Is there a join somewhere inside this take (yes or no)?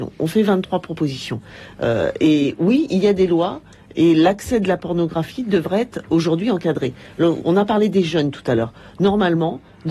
no